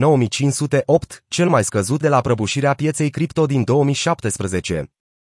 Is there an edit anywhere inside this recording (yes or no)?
yes